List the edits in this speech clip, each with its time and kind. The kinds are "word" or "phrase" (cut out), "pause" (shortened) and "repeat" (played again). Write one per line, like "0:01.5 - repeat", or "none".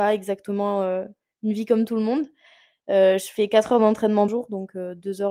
0:04.3 - word